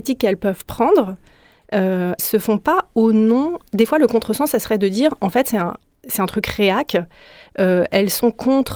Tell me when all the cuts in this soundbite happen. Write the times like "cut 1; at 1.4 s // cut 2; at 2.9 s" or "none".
cut 1; at 2.2 s